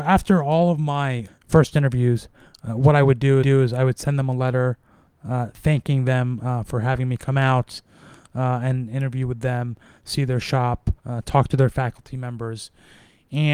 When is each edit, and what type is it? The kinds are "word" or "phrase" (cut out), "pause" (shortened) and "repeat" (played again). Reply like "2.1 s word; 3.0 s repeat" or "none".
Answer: 1.3 s word; 3.4 s repeat; 11.0 s pause